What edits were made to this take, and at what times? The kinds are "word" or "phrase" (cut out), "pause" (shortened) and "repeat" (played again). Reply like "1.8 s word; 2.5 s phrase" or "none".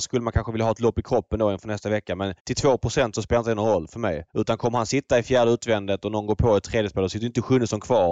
2.4 s pause; 4.3 s pause